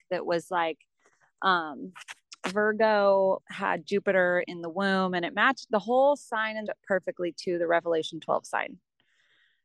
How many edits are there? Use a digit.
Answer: 2